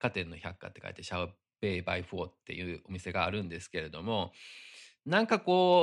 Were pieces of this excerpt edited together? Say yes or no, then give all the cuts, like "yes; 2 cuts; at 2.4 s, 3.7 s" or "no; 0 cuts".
no; 0 cuts